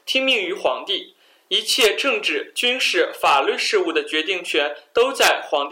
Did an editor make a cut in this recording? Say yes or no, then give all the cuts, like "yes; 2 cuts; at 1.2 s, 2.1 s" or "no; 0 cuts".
no; 0 cuts